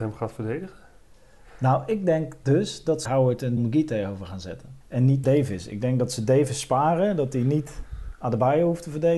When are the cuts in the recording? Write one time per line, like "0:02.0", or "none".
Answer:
0:03.0
0:03.6
0:04.8
0:05.2